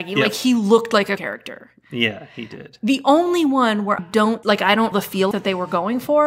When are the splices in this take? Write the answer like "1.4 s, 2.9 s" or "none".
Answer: 1.2 s, 4.0 s, 4.4 s, 4.9 s, 5.3 s

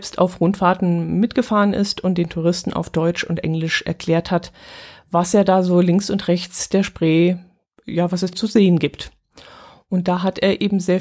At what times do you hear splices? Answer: 8.3 s

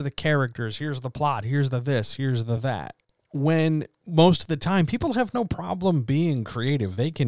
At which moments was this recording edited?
none

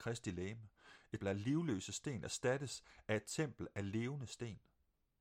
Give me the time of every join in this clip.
1.2 s

